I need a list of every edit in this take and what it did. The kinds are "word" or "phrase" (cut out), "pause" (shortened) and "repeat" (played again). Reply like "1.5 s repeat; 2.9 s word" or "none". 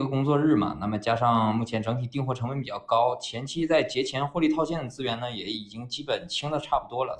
none